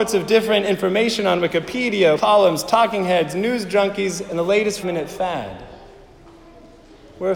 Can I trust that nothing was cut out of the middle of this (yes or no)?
no